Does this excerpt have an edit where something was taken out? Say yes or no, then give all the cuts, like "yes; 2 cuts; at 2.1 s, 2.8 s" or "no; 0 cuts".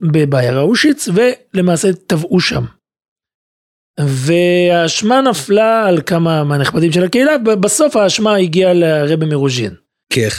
no; 0 cuts